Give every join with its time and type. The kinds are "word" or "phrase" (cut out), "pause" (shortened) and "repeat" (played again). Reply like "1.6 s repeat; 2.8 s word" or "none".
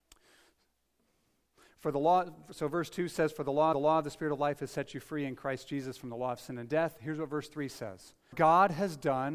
3.7 s repeat; 8.3 s word